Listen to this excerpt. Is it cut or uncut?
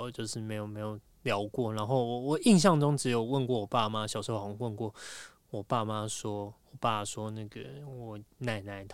cut